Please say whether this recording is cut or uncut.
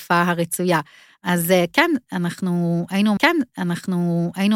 cut